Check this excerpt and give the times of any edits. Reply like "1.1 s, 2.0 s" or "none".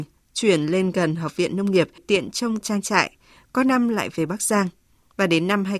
2.0 s, 2.6 s